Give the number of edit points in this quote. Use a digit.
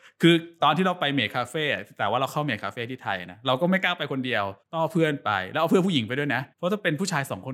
2